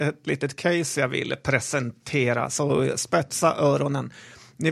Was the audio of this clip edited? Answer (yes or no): no